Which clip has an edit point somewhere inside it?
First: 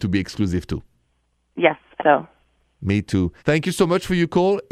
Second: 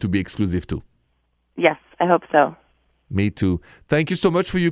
first; 2 cuts; at 2.0 s, 3.4 s

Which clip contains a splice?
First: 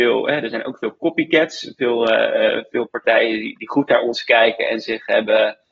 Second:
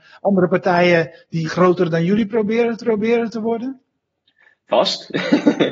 second; 2 cuts; at 1.4 s, 2.8 s

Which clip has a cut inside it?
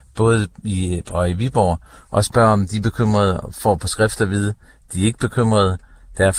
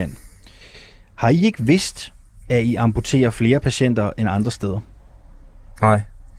first; 1 cut; at 1.1 s

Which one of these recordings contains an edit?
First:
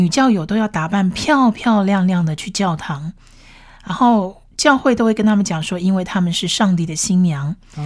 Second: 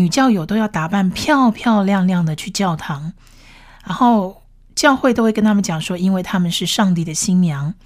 first; 1 cut; at 4.5 s

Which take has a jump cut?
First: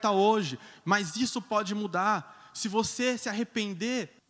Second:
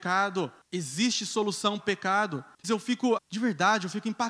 second; 3 cuts; at 1.8 s, 2.6 s, 3.2 s

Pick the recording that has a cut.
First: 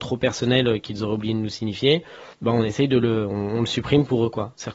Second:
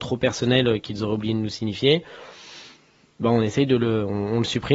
first; 1 cut; at 2.3 s

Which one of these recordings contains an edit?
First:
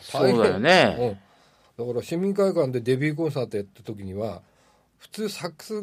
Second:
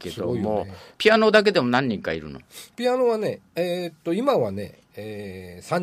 second; 1 cut; at 0.9 s

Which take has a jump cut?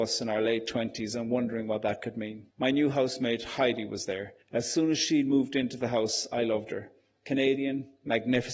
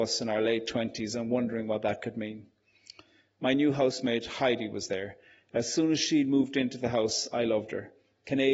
first; 2 cuts; at 2.5 s, 4.4 s

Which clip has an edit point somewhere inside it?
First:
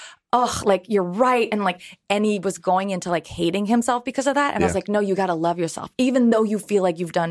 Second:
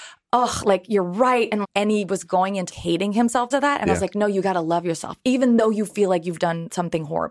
second; 3 cuts; at 1.6 s, 2.7 s, 3.5 s

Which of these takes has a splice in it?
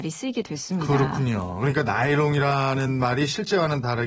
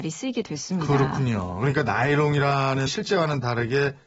second; 1 cut; at 2.9 s

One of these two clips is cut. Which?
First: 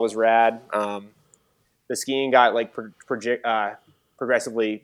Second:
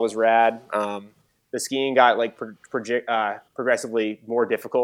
second; 2 cuts; at 1.2 s, 3.5 s

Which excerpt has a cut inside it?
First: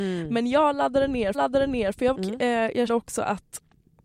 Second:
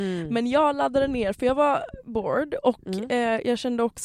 first; 3 cuts; at 1.3 s, 2.1 s, 2.9 s

